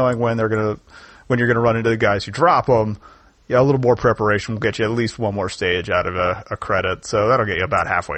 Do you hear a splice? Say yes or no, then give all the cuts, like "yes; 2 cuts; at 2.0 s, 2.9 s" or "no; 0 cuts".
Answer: no; 0 cuts